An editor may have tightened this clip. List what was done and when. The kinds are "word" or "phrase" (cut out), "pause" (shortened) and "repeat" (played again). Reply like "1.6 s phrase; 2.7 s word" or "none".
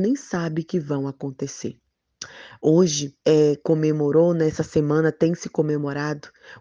3.2 s pause